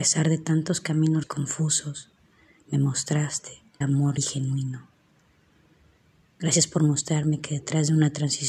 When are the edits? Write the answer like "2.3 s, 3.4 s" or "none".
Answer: 1.2 s, 3.8 s, 4.2 s